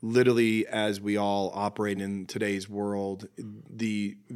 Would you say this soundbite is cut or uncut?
uncut